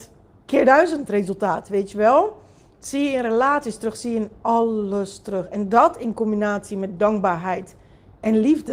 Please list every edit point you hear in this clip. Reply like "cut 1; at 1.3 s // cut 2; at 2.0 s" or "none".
none